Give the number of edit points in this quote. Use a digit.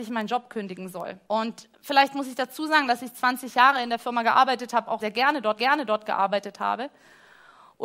3